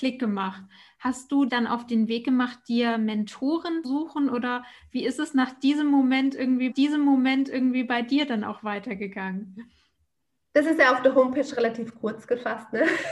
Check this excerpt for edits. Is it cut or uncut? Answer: cut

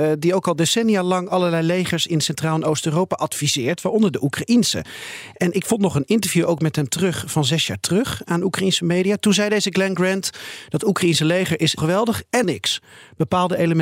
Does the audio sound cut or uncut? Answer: cut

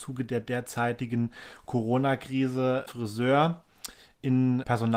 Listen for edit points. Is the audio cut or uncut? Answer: cut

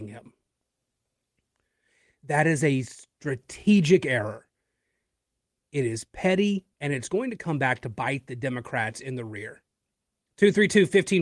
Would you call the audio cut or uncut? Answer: cut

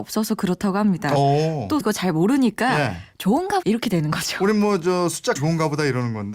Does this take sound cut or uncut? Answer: cut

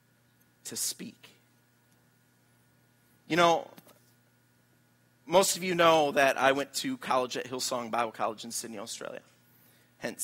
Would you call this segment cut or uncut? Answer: uncut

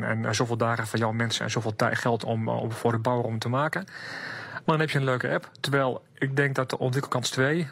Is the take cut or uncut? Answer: uncut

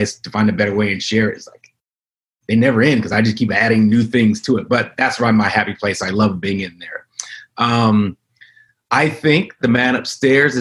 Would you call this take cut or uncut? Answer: uncut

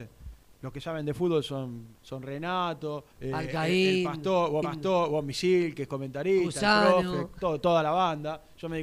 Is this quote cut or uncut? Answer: cut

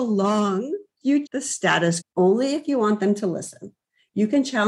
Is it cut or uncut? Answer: cut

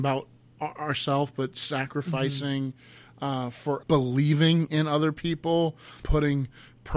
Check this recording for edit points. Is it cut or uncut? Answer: cut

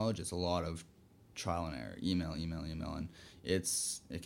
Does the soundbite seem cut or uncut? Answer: uncut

